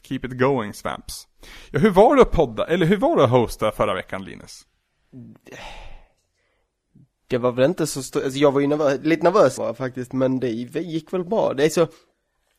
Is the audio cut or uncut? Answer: cut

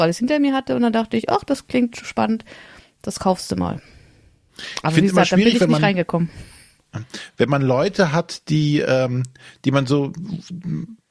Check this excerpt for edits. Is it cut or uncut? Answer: uncut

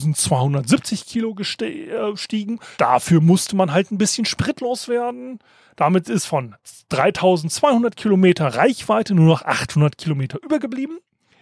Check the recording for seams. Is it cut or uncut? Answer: cut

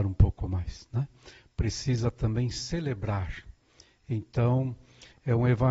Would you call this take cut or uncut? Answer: uncut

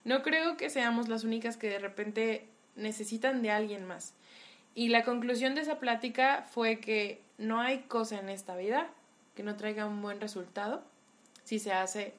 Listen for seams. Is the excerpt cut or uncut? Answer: uncut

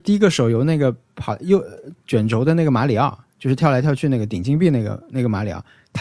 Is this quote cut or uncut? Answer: cut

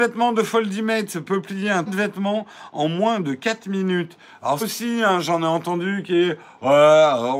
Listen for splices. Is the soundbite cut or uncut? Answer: cut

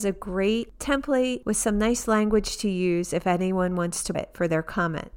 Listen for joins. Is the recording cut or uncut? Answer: cut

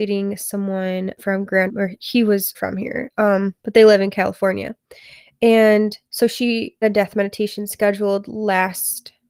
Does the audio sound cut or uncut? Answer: cut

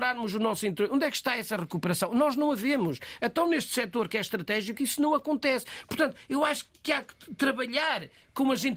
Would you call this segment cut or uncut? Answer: uncut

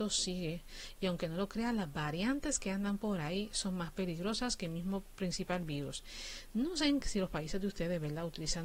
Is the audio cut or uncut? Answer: uncut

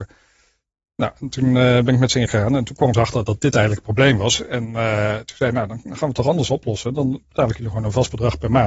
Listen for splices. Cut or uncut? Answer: cut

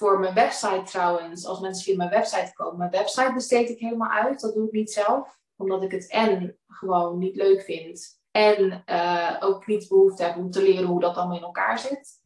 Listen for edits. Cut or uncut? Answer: cut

